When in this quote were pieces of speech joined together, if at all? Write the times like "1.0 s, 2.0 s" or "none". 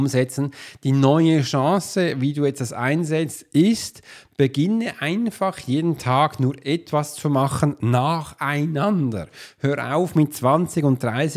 none